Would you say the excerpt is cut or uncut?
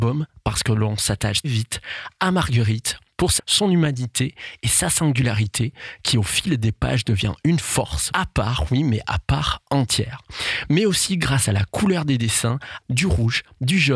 cut